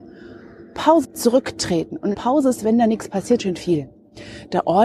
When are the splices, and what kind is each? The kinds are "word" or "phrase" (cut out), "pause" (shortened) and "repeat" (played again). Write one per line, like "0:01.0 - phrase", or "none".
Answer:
0:01.0 - word
0:02.1 - word
0:02.6 - phrase
0:03.4 - phrase